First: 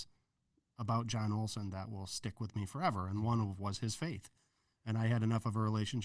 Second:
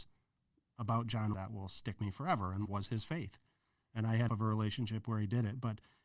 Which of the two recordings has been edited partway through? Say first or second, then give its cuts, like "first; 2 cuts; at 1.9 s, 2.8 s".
second; 4 cuts; at 1.3 s, 2.0 s, 2.7 s, 4.3 s